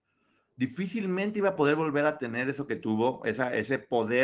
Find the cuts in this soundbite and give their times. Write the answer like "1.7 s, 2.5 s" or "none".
none